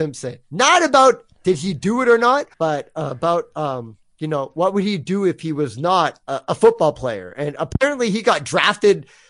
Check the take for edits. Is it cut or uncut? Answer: cut